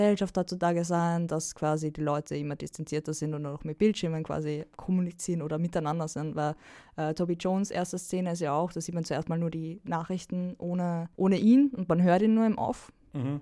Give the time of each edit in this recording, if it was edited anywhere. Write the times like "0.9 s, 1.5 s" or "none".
4.7 s, 11.1 s